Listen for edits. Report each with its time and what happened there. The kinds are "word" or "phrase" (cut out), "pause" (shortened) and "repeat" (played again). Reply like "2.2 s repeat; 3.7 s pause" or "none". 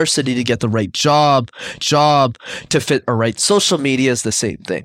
1.8 s repeat; 3.4 s word